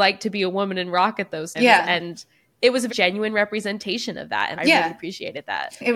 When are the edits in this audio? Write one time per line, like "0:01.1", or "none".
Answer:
0:01.5
0:02.9
0:04.6